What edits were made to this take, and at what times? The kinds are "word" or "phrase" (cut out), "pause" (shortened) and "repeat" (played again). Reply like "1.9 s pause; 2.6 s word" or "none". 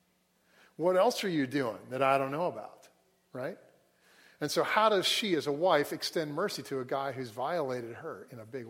none